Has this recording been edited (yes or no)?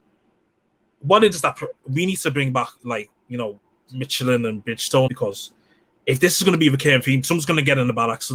yes